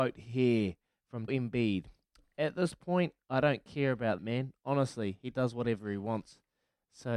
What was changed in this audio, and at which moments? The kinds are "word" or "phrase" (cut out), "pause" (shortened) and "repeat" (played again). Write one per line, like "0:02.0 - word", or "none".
0:01.3 - word
0:04.2 - word

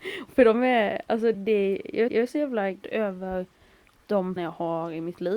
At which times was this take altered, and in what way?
0:01.3 - word
0:02.1 - repeat
0:02.8 - word
0:04.4 - word

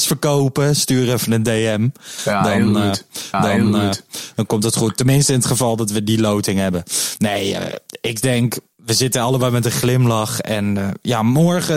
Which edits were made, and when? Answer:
0:03.3 - repeat

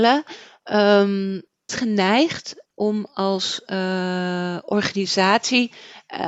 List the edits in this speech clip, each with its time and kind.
0:01.7 - phrase
0:02.7 - word

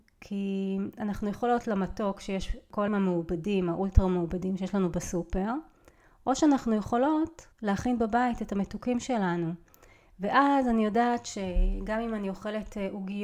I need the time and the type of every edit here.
0:01.6 - word
0:02.9 - word
0:07.5 - pause

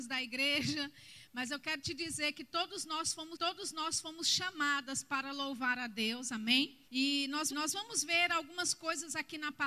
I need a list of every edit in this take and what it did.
0:03.3 - repeat
0:06.9 - pause
0:07.5 - repeat

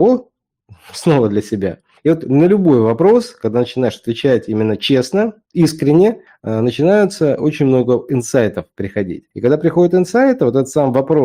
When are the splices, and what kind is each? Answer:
0:02.0 - pause
0:06.3 - pause
0:09.3 - pause

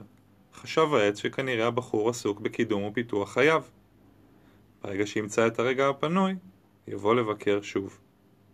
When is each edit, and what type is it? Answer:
none

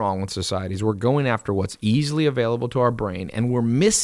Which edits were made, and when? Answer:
none

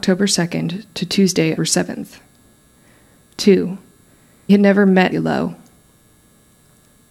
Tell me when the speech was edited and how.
0:01.6 - word
0:04.5 - word
0:05.1 - word

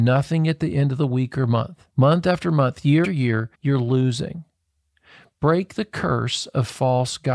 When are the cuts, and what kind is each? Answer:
0:01.9 - pause
0:03.0 - word
0:03.5 - pause

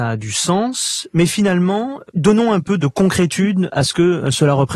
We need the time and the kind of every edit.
none

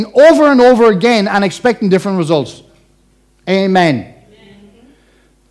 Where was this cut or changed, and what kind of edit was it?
none

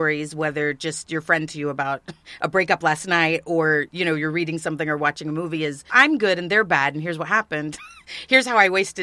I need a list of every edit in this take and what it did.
0:01.5 - word
0:05.9 - word

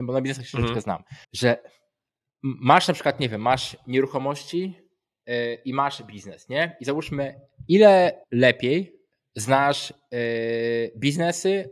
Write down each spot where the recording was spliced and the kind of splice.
0:01.2 - pause
0:08.2 - pause

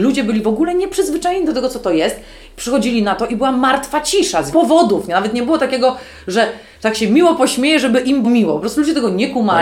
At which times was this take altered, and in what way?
0:04.5 - word
0:08.2 - word

